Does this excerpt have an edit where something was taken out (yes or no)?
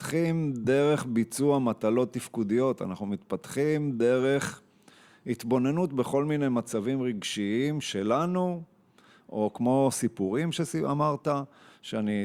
no